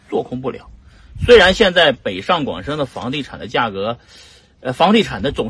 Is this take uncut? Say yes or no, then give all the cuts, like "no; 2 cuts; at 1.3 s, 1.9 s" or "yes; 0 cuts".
yes; 0 cuts